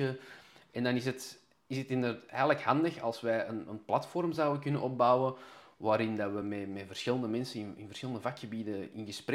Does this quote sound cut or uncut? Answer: uncut